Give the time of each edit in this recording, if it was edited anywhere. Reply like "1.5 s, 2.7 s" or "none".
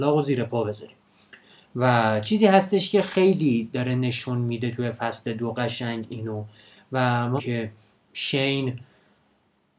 7.4 s